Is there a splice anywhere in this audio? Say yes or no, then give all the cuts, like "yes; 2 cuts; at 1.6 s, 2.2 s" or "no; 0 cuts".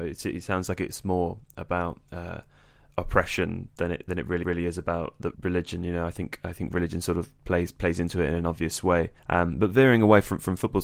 yes; 3 cuts; at 4.4 s, 5.3 s, 9.2 s